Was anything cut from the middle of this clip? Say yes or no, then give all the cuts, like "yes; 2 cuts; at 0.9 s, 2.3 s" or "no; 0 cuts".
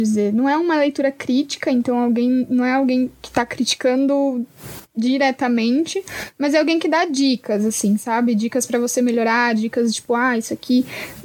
no; 0 cuts